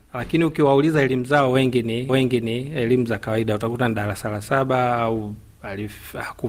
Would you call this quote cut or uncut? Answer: cut